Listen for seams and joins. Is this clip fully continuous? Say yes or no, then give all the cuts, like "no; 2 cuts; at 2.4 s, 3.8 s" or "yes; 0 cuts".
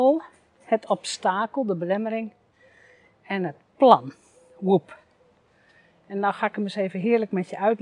yes; 0 cuts